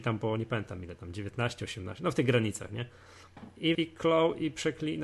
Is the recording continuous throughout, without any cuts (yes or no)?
no